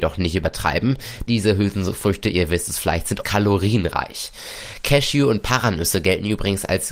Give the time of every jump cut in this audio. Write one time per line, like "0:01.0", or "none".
0:01.3
0:03.2